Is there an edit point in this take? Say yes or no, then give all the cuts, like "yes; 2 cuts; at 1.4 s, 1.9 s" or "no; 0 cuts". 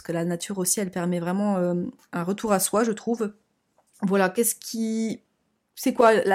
no; 0 cuts